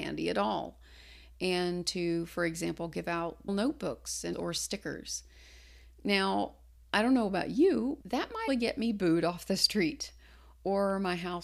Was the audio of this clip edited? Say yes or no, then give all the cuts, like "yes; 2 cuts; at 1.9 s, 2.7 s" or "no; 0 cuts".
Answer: yes; 4 cuts; at 3.5 s, 4.3 s, 8.0 s, 8.5 s